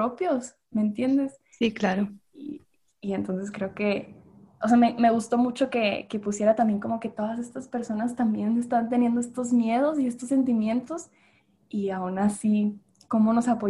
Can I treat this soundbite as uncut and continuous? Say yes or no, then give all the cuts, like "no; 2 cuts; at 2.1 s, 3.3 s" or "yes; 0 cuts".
yes; 0 cuts